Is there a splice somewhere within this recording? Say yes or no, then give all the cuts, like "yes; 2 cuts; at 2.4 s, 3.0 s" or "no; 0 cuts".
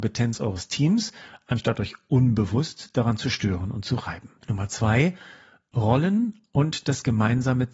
yes; 1 cut; at 4.4 s